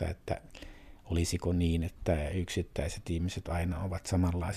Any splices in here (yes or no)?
no